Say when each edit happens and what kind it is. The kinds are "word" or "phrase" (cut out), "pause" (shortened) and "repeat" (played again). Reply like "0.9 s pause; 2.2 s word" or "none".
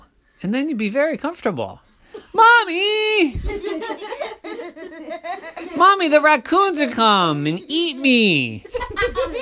6.9 s word